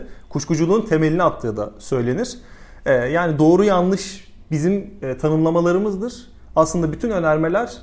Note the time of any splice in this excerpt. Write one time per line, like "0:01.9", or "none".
none